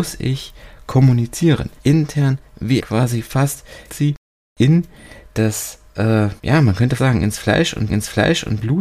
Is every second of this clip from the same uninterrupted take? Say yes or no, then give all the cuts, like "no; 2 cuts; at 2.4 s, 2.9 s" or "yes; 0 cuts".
no; 6 cuts; at 1.8 s, 2.8 s, 3.9 s, 6.4 s, 7.0 s, 7.9 s